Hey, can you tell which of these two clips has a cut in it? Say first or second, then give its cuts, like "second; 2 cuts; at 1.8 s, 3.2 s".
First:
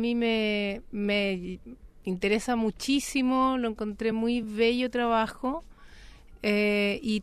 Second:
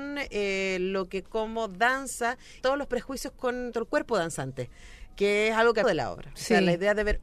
second; 4 cuts; at 1.2 s, 2.6 s, 3.7 s, 5.8 s